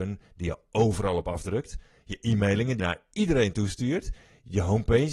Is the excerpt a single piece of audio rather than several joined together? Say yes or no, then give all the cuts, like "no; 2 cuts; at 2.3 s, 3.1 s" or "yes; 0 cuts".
no; 1 cut; at 2.8 s